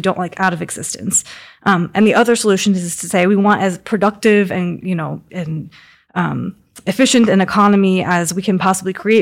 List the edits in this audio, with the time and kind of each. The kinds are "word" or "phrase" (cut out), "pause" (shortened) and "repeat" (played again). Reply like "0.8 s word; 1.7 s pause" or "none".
5.3 s word